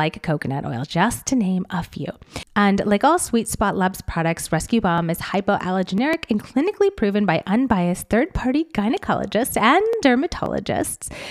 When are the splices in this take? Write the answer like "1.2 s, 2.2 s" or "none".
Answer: 2.5 s